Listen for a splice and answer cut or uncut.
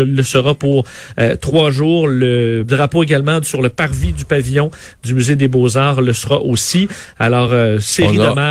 uncut